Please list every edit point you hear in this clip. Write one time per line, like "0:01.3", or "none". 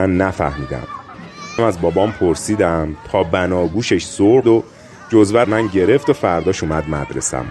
0:01.6
0:04.4
0:05.4

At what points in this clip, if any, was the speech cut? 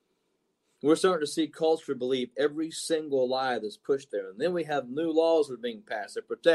0:04.1

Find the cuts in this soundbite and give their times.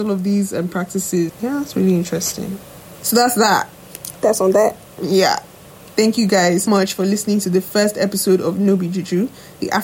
0:01.3
0:06.7

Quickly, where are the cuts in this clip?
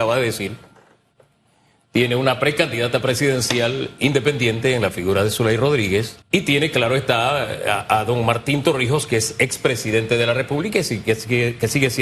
0:06.2

